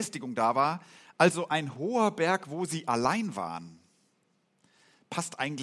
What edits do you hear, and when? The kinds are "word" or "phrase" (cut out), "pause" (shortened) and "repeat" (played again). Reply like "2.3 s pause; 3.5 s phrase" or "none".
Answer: none